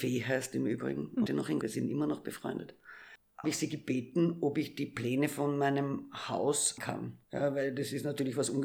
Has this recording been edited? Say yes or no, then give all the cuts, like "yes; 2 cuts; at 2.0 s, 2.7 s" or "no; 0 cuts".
yes; 5 cuts; at 1.3 s, 1.6 s, 3.4 s, 6.8 s, 7.2 s